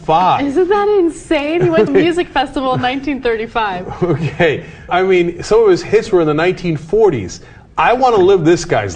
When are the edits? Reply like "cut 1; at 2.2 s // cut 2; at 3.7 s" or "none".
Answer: cut 1; at 1.9 s // cut 2; at 4.9 s